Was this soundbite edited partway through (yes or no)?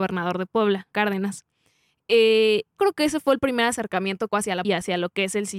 yes